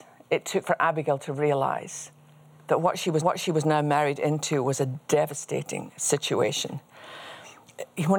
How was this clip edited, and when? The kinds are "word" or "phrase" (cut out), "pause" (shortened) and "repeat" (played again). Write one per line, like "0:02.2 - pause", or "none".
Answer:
0:03.2 - repeat